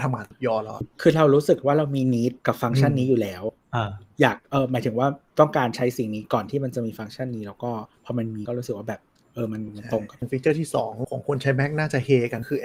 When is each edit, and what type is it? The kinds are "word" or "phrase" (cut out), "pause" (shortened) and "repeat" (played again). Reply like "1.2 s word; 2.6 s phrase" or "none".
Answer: 2.4 s pause; 4.4 s pause